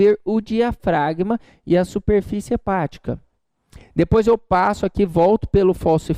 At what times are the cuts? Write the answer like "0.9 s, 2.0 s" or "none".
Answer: none